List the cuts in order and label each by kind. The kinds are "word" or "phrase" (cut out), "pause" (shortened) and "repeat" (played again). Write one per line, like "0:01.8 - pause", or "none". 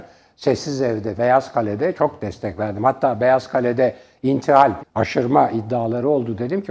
0:01.2 - word
0:01.9 - word
0:04.8 - word

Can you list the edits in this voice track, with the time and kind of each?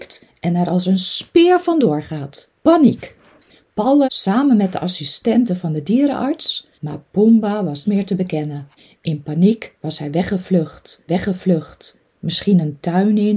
0:02.6 - pause
0:04.0 - word
0:06.7 - pause
0:07.8 - word
0:08.8 - pause
0:11.1 - repeat

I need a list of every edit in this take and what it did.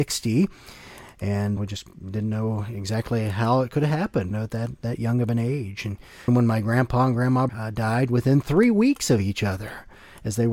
0:01.6 - word
0:04.3 - word
0:06.3 - word
0:07.5 - word

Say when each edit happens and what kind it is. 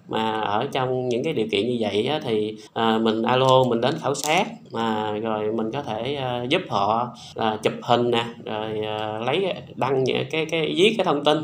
0:02.7 - pause
0:04.6 - pause
0:07.3 - pause

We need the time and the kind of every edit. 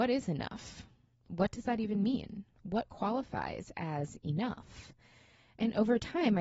none

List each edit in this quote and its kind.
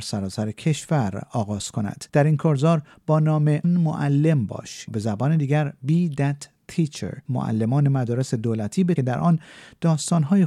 0:02.1 - pause
0:03.6 - word
0:04.9 - word
0:07.2 - pause
0:09.0 - phrase

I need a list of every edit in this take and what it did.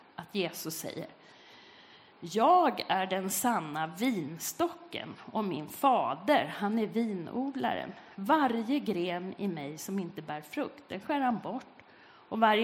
none

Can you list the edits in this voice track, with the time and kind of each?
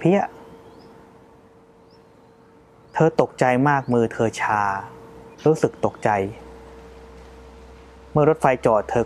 0:05.3 - pause

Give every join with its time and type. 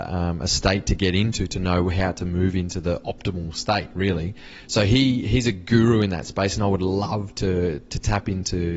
none

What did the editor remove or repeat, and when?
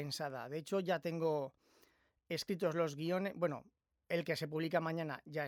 none

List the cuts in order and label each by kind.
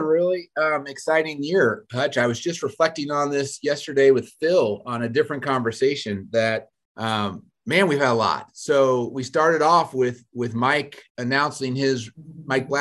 0:06.7 - pause
0:11.1 - pause

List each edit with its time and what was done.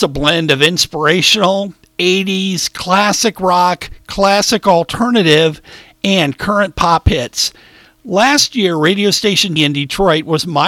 0:09.6 - word

